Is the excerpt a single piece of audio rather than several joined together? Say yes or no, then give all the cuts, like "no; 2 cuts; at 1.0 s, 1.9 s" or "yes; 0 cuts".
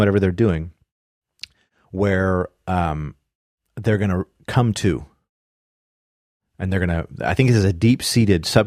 yes; 0 cuts